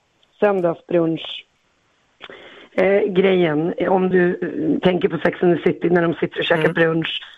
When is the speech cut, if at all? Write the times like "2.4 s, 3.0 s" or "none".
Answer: none